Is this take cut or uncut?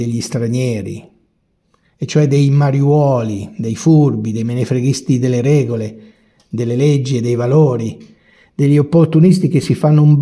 uncut